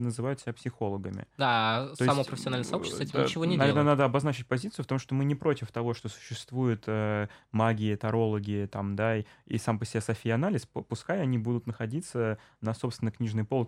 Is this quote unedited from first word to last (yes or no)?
yes